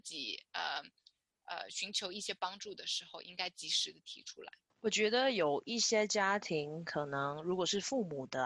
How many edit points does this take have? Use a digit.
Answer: 0